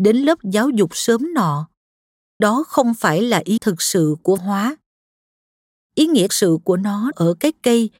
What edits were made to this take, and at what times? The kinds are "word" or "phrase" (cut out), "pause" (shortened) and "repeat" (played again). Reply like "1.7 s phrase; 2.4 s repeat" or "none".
2.4 s word; 3.6 s word; 4.4 s word; 6.3 s word; 7.1 s word